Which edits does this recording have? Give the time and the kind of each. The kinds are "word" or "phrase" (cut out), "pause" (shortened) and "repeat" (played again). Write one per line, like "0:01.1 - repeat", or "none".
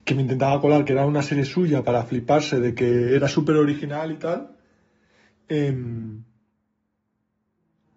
none